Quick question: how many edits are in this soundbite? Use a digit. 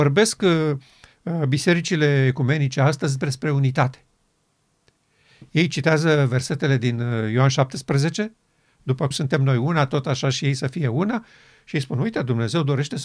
1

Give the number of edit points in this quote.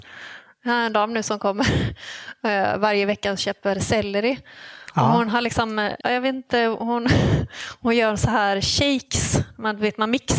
1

